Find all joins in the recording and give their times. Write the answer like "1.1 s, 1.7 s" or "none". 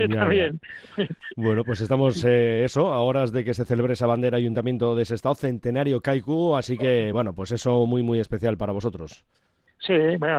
none